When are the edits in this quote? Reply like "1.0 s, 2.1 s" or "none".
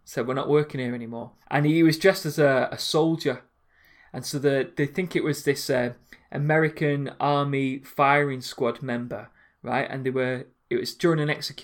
1.4 s